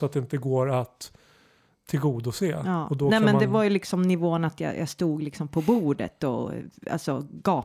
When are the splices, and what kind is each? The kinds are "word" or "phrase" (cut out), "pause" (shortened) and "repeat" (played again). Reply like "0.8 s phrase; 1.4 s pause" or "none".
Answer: none